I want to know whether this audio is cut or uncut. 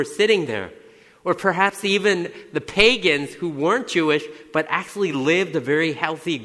uncut